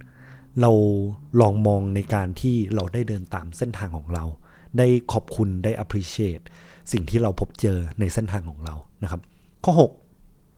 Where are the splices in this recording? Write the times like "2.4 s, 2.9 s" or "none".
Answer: none